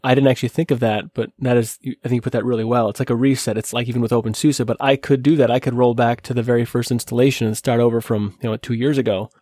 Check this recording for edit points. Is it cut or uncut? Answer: uncut